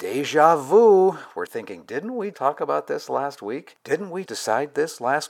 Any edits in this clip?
yes; 3 cuts; at 1.5 s, 2.3 s, 4.3 s

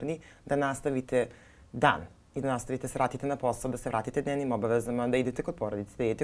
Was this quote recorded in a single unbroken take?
yes; 0 cuts

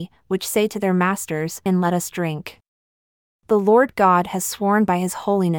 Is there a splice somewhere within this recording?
yes; 1 cut; at 1.7 s

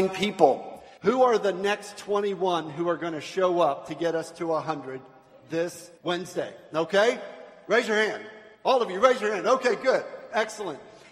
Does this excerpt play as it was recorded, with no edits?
no; 3 cuts; at 1.0 s, 6.0 s, 8.5 s

